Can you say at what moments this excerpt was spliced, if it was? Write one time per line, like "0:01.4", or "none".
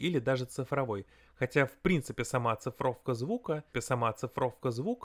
0:03.7